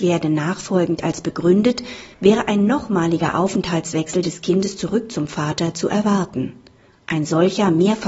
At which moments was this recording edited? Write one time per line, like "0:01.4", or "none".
0:02.1

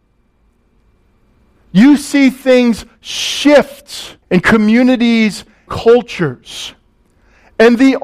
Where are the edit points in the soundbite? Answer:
0:04.2
0:05.7

